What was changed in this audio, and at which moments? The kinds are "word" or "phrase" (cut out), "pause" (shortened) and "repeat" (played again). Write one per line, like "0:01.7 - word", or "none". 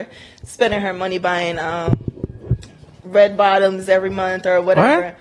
none